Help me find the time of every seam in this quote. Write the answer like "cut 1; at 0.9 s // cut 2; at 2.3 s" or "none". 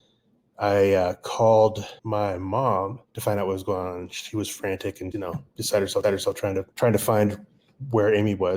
cut 1; at 2.0 s // cut 2; at 3.1 s // cut 3; at 5.1 s // cut 4; at 6.0 s // cut 5; at 6.7 s